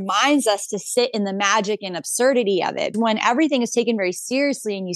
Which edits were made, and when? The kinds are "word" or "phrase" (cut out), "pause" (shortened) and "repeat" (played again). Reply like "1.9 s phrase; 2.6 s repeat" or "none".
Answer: 2.9 s word